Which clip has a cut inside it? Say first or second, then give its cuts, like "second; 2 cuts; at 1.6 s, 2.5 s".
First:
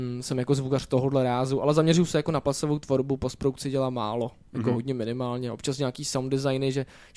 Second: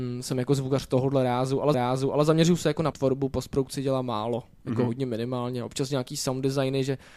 second; 2 cuts; at 1.7 s, 2.9 s